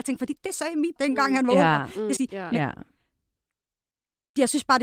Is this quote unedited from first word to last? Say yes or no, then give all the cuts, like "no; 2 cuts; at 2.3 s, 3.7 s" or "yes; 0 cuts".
no; 2 cuts; at 1.0 s, 2.2 s